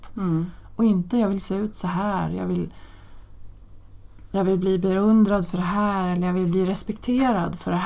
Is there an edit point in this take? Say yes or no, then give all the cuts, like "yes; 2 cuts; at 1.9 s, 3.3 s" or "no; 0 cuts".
no; 0 cuts